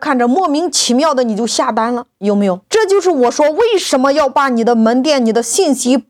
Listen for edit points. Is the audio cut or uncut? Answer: cut